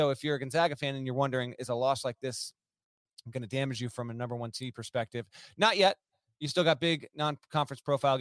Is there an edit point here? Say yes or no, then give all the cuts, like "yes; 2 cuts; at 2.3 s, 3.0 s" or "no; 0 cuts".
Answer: no; 0 cuts